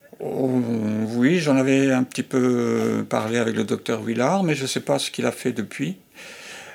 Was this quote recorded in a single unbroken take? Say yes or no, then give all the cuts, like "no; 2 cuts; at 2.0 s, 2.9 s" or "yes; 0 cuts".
yes; 0 cuts